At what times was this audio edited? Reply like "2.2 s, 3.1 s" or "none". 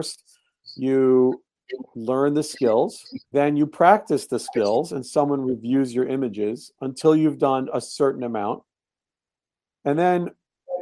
3.2 s